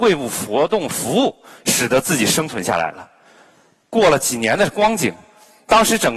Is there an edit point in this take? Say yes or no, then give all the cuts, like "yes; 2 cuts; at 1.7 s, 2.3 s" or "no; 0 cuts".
no; 0 cuts